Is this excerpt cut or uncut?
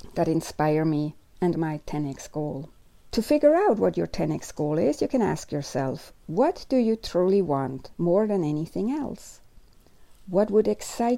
cut